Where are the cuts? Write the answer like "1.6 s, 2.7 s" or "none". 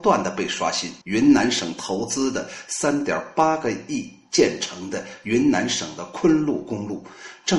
1.0 s